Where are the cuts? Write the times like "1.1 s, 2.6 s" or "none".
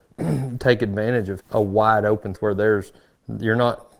1.4 s, 2.4 s